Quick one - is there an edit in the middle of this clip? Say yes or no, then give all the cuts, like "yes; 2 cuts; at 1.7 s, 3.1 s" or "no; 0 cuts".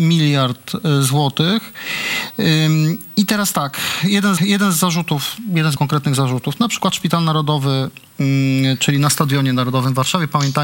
yes; 2 cuts; at 4.4 s, 5.8 s